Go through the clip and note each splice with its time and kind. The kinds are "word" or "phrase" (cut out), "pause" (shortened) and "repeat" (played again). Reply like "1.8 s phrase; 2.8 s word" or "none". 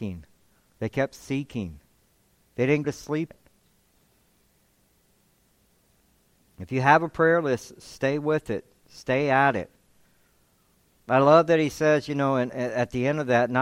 2.8 s word; 3.3 s word; 12.5 s word